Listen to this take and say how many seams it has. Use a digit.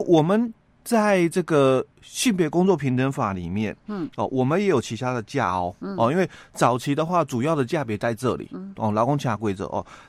1